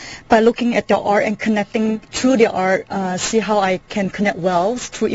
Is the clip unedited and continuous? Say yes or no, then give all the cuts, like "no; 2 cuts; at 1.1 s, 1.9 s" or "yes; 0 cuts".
no; 1 cut; at 2.0 s